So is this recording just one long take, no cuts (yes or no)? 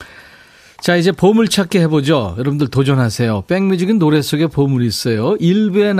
yes